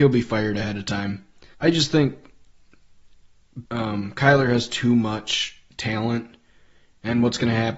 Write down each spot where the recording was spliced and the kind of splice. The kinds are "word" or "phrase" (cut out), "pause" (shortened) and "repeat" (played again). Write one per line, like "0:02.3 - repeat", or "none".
0:01.5 - pause
0:03.7 - pause